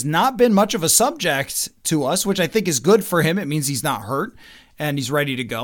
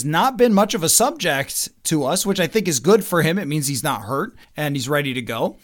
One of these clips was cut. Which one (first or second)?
second